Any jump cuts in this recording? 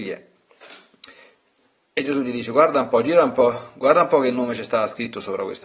no; 0 cuts

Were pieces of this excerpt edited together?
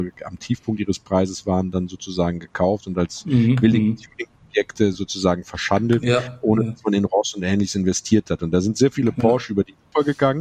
no; 0 cuts

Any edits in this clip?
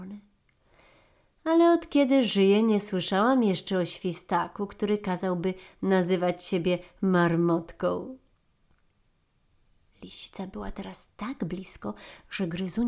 no; 0 cuts

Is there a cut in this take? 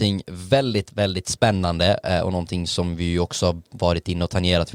no; 0 cuts

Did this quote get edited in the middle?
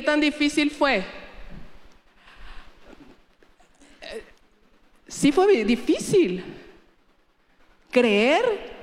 no; 0 cuts

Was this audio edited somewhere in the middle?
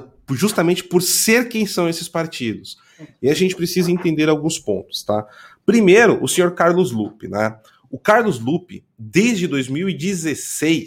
no; 0 cuts

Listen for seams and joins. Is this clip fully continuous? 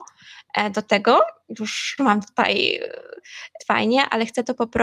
no; 2 cuts; at 2.0 s, 3.6 s

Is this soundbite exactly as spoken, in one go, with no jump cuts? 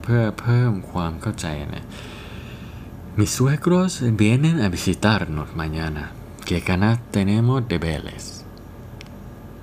yes; 0 cuts

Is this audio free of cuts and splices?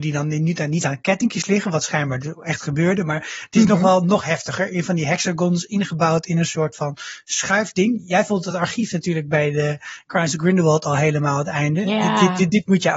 yes; 0 cuts

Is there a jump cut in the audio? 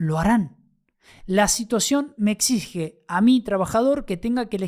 no; 0 cuts

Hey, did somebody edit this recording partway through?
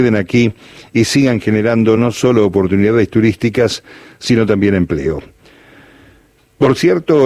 no; 0 cuts

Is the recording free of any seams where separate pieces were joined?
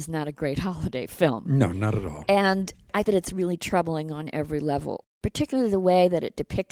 no; 1 cut; at 3.0 s

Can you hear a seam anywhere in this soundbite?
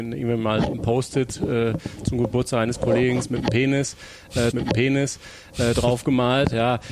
yes; 1 cut; at 4.5 s

